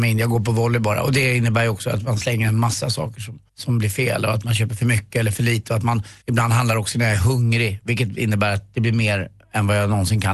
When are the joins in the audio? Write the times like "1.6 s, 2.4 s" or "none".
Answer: 3.5 s, 6.2 s

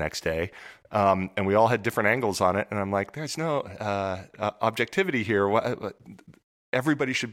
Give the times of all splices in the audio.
none

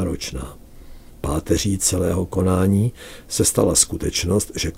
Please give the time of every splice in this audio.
none

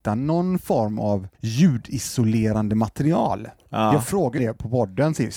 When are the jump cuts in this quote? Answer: 1.3 s, 4.4 s

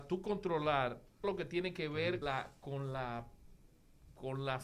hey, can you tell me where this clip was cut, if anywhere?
1.2 s, 2.2 s

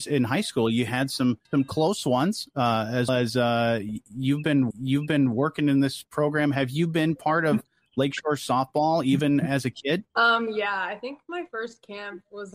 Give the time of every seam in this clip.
1.4 s, 3.1 s, 4.7 s, 10.1 s

